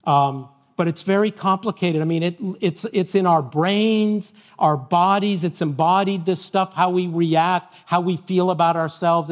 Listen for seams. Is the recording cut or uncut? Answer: uncut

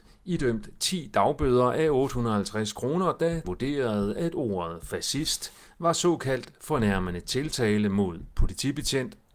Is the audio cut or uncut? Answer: cut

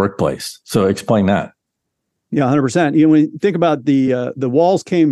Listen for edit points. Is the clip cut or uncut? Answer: uncut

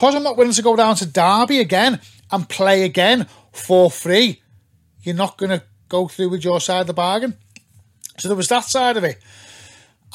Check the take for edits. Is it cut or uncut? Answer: uncut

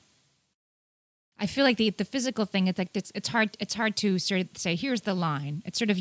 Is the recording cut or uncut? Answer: uncut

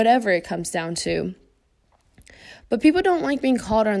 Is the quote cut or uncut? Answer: uncut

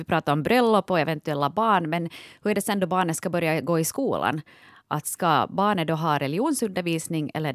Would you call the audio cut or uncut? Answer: uncut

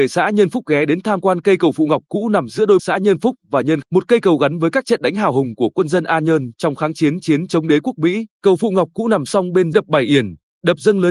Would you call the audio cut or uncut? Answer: cut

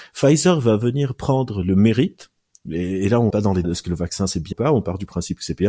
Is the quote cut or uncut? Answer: cut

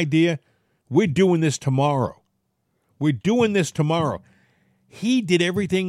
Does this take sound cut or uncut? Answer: uncut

